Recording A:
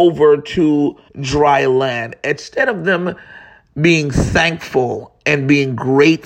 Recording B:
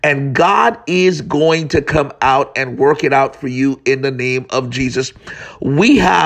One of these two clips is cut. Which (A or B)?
A